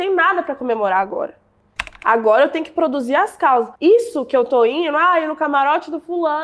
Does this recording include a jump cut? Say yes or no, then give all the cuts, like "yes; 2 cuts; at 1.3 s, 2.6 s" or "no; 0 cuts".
yes; 1 cut; at 3.8 s